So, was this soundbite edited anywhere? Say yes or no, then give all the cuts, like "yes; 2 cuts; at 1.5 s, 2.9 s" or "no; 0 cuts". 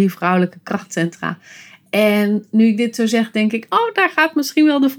no; 0 cuts